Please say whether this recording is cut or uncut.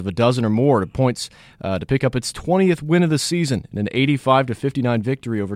uncut